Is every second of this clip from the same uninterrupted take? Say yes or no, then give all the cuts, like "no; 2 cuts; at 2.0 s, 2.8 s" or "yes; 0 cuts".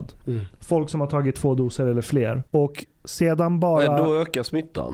no; 1 cut; at 2.5 s